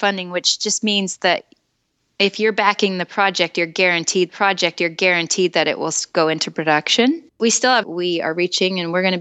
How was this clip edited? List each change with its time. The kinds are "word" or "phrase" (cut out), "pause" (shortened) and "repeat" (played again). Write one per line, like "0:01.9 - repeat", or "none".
0:04.3 - repeat
0:07.3 - pause
0:07.8 - phrase